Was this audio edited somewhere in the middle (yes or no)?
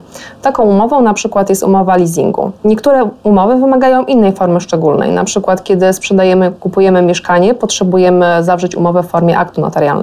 no